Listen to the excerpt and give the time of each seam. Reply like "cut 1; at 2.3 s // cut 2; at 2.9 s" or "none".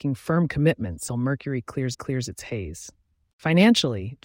cut 1; at 1.1 s // cut 2; at 1.9 s